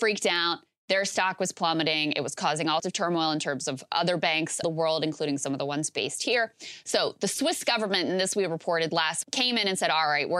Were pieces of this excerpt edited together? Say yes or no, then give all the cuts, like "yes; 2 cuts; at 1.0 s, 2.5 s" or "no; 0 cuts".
yes; 3 cuts; at 2.8 s, 4.6 s, 9.2 s